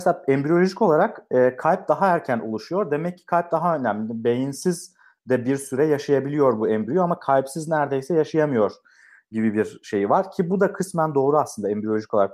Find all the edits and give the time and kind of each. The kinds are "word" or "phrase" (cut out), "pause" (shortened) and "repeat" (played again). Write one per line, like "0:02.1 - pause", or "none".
none